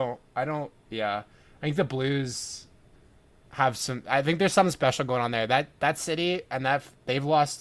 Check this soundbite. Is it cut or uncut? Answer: uncut